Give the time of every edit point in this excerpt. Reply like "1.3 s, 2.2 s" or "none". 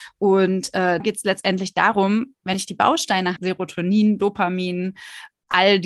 1.0 s, 2.5 s, 3.4 s